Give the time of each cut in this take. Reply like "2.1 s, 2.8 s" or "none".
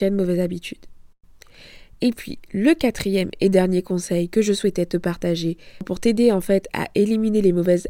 none